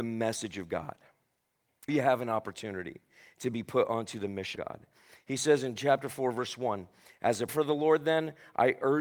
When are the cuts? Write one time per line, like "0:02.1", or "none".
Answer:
0:01.9
0:04.6
0:07.5